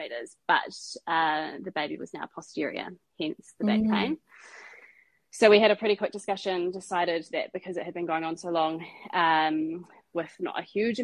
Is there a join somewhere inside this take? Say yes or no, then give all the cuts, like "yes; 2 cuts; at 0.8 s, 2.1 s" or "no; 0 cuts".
no; 0 cuts